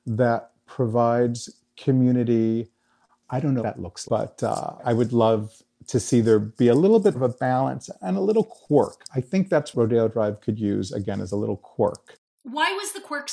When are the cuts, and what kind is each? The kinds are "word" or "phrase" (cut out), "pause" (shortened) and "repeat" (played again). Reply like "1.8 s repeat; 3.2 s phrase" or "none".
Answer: 3.6 s word; 4.0 s word; 4.8 s word; 7.1 s word; 9.7 s word